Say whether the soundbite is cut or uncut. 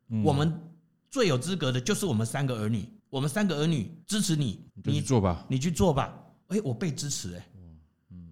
cut